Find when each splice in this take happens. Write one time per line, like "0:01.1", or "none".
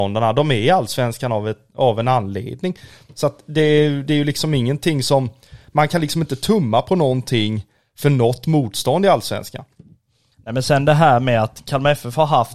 none